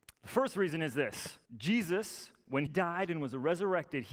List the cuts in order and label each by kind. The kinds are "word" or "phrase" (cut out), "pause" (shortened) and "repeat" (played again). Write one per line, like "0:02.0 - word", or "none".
0:01.5 - pause
0:02.7 - word